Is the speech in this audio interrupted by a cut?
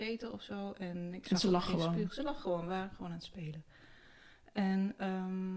no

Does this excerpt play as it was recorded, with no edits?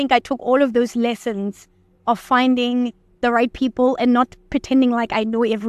yes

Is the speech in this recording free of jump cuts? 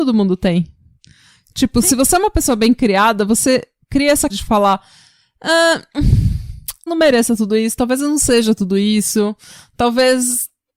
no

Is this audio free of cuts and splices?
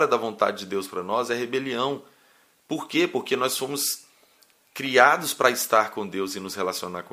yes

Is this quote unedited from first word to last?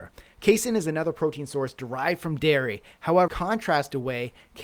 no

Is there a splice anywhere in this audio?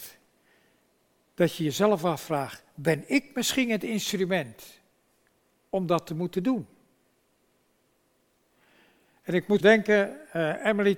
yes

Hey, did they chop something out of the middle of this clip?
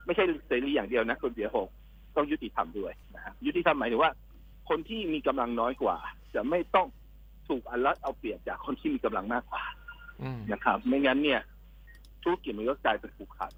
yes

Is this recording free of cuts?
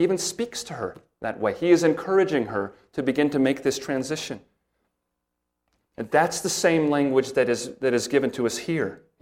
yes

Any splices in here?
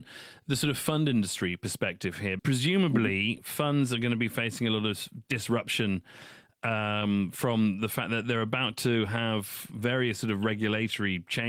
yes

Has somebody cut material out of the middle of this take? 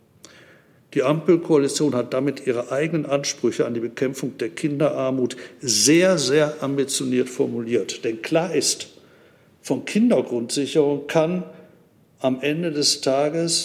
no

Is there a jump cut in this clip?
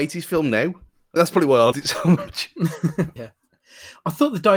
yes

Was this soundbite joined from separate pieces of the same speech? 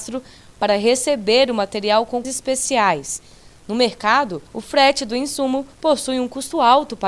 yes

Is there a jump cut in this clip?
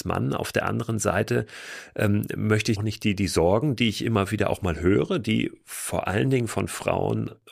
yes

